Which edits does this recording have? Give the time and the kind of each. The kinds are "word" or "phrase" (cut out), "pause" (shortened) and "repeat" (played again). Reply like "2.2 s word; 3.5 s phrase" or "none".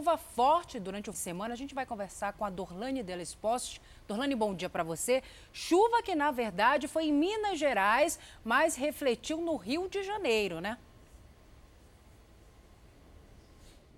1.1 s phrase

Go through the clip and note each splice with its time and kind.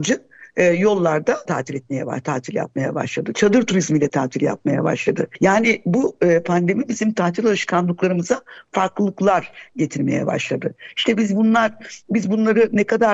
1.4 s word

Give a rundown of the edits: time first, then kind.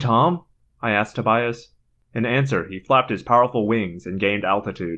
none

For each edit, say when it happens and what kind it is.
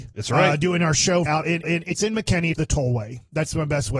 1.3 s word; 1.6 s repeat; 2.6 s phrase

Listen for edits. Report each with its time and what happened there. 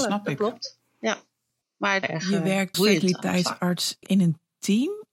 2.0 s phrase; 2.7 s word; 4.0 s word

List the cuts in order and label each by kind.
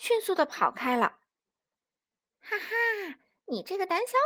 none

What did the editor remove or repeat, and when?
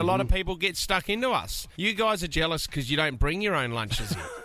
1.7 s pause; 2.3 s word

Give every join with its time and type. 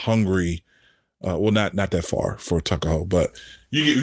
none

